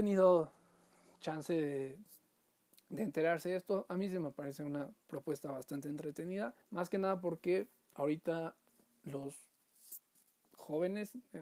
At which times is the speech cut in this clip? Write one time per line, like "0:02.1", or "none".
0:06.6